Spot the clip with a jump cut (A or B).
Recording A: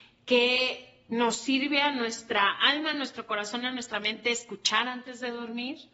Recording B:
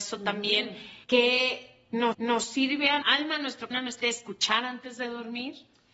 B